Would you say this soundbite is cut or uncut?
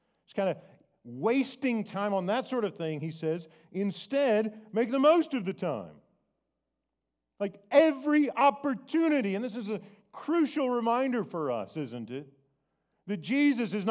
uncut